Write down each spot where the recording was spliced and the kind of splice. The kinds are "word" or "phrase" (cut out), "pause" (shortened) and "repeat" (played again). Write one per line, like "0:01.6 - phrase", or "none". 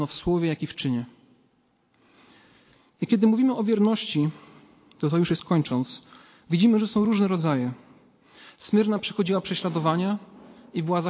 none